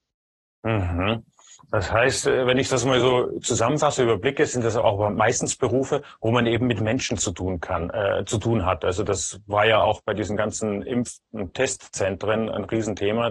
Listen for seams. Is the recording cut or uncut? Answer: uncut